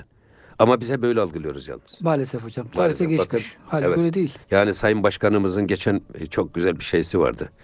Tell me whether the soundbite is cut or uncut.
cut